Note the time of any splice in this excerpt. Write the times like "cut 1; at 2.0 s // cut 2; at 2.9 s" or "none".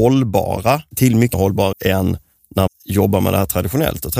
cut 1; at 0.9 s // cut 2; at 1.3 s // cut 3; at 1.7 s // cut 4; at 2.7 s